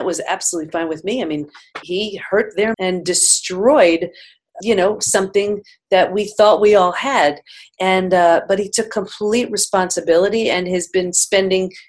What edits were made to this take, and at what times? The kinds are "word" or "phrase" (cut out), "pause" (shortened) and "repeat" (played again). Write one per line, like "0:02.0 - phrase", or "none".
0:01.8 - word
0:02.7 - word
0:04.6 - word